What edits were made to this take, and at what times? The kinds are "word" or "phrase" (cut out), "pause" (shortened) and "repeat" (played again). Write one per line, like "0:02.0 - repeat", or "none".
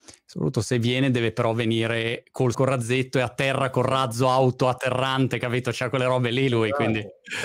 0:02.5 - phrase